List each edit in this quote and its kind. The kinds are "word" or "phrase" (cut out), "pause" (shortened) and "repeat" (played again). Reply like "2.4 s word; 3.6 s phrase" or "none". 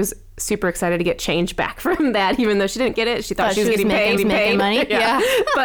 2.9 s word; 4.2 s repeat

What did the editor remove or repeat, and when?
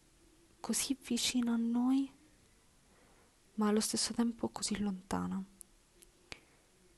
none

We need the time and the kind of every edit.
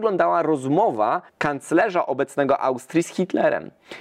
1.3 s pause

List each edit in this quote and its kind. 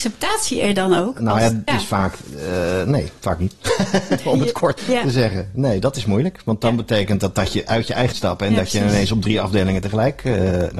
1.7 s word; 4.8 s word; 8.1 s phrase

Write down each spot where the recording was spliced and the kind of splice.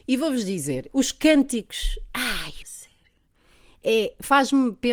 2.6 s phrase

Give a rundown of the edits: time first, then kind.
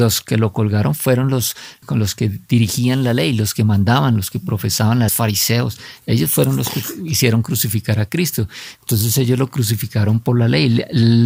5.1 s phrase

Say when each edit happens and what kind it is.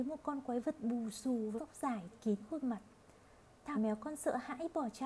1.6 s word; 2.1 s word; 3.7 s word

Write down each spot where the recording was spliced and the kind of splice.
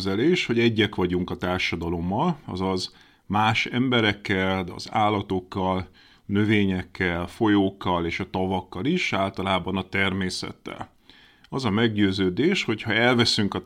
none

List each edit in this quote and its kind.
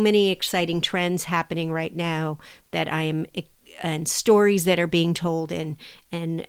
none

